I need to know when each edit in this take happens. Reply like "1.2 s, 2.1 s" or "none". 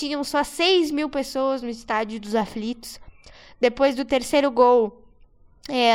none